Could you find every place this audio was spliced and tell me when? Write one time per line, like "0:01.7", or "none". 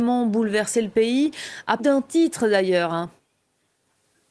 0:01.8